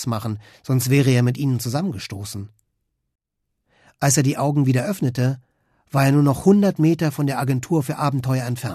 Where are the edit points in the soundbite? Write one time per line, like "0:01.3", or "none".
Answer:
none